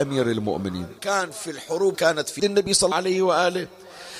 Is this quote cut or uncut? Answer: cut